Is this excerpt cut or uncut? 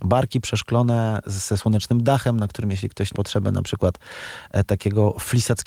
cut